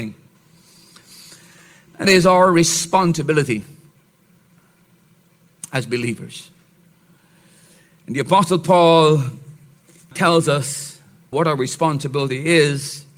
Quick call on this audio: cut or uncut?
cut